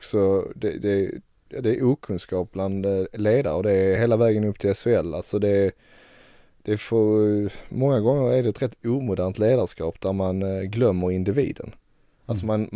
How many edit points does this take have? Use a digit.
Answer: 0